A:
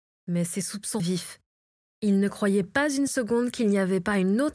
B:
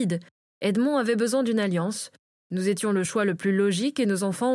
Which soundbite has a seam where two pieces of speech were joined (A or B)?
A